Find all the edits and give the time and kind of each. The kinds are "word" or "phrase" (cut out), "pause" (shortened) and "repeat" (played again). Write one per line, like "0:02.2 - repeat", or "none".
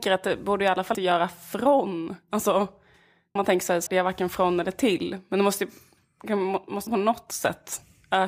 0:00.9 - word
0:03.4 - word
0:03.9 - word
0:06.9 - word